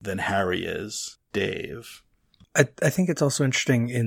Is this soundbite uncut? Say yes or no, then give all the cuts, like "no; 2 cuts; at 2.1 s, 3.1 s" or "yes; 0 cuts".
no; 1 cut; at 1.3 s